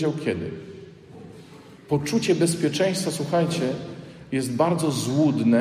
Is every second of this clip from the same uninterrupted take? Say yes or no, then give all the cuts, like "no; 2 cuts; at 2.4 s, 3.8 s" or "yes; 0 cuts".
no; 1 cut; at 1.8 s